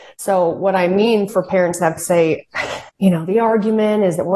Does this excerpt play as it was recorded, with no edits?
no; 3 cuts; at 1.3 s, 2.0 s, 2.9 s

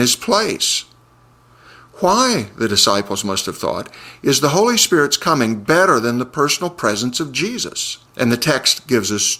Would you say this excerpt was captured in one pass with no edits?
no; 1 cut; at 8.1 s

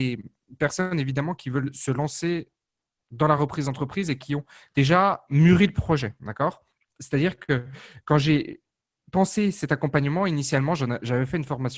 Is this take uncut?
yes; 0 cuts

